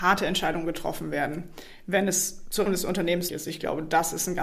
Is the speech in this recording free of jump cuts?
no; 2 cuts; at 2.7 s, 3.3 s

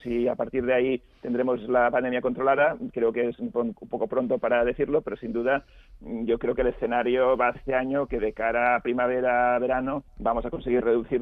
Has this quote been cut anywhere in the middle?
yes; 2 cuts; at 7.5 s, 10.1 s

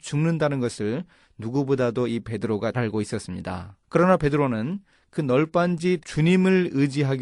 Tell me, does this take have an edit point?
yes; 3 cuts; at 2.7 s, 3.8 s, 6.0 s

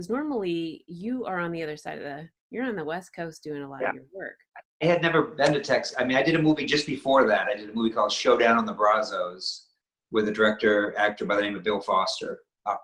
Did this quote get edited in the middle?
yes; 1 cut; at 2.4 s

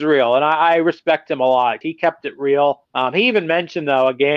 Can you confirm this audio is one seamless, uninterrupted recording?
no; 2 cuts; at 1.8 s, 2.9 s

